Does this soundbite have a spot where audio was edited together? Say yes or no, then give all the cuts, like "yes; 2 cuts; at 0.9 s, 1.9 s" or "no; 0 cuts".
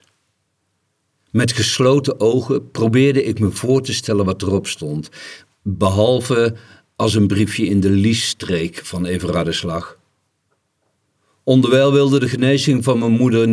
no; 0 cuts